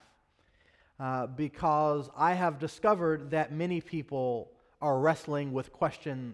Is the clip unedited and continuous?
yes; 0 cuts

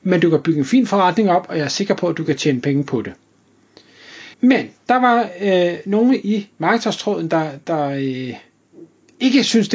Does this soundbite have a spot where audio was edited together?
yes; 1 cut; at 4.3 s

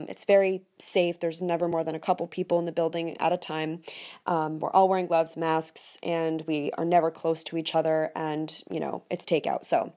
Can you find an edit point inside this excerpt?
no; 0 cuts

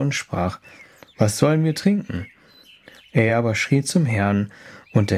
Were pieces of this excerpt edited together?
no; 0 cuts

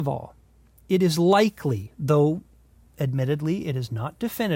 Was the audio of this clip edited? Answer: no; 0 cuts

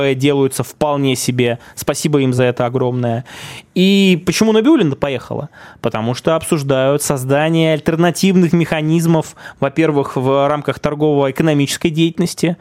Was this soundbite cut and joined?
no; 0 cuts

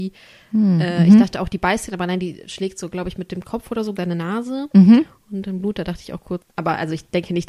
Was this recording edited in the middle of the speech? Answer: yes; 2 cuts; at 4.0 s, 6.4 s

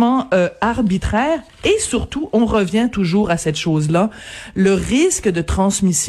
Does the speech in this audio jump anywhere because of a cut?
no; 0 cuts

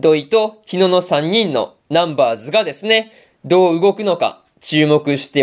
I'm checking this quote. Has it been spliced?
no; 0 cuts

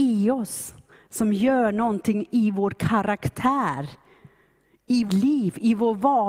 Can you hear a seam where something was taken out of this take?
yes; 1 cut; at 5.1 s

